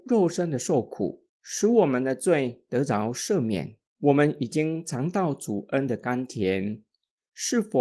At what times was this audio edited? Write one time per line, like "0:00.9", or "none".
0:03.9